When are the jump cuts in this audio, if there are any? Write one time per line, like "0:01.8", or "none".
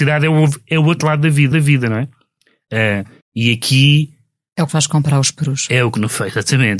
0:01.5
0:03.2
0:04.7